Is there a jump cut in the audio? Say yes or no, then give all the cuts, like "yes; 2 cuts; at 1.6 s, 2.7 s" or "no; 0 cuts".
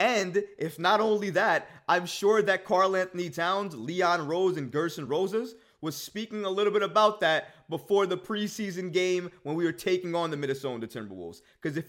no; 0 cuts